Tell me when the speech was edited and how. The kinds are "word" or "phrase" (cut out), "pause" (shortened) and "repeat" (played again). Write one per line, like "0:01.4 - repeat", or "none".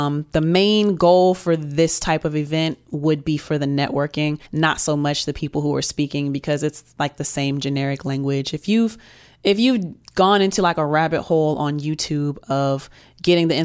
0:04.5 - pause